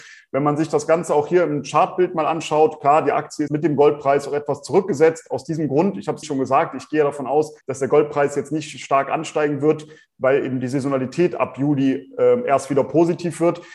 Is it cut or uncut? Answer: cut